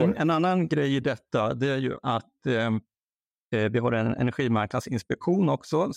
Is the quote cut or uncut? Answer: uncut